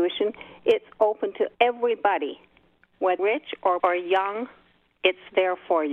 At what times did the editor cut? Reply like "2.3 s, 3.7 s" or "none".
1.5 s, 3.2 s, 3.8 s